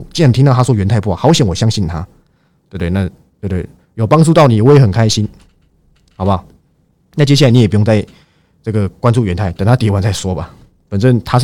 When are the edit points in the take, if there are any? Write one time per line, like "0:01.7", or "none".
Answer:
none